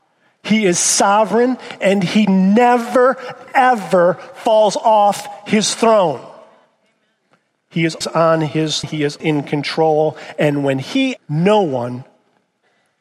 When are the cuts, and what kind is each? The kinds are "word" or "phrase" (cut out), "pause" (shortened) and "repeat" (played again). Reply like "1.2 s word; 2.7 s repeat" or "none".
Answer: 8.0 s word; 8.8 s word; 9.2 s word; 11.2 s word